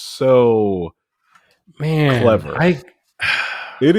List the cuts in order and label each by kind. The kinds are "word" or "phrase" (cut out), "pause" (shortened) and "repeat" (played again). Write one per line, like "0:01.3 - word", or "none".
none